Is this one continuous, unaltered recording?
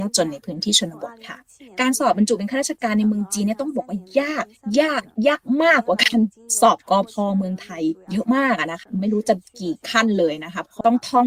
yes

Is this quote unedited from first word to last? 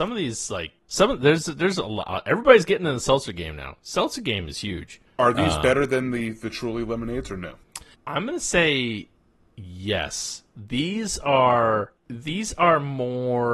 yes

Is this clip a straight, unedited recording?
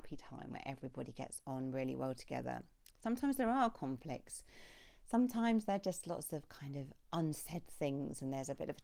yes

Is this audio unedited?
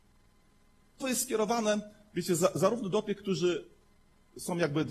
no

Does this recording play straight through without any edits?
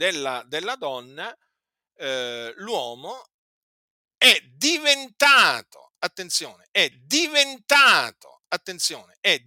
no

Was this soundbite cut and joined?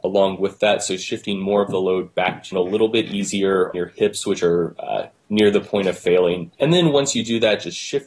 yes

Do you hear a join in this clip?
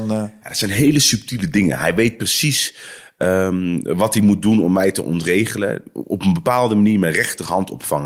no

